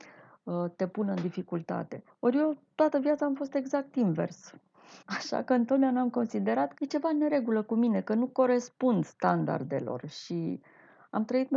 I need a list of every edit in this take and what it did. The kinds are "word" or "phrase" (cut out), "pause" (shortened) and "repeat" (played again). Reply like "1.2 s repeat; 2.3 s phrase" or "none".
2.1 s pause; 5.0 s pause; 6.8 s word